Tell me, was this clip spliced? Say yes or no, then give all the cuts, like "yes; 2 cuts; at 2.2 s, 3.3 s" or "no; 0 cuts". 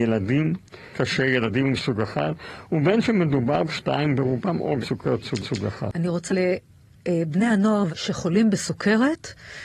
yes; 7 cuts; at 0.9 s, 1.8 s, 3.6 s, 4.8 s, 5.4 s, 6.3 s, 7.9 s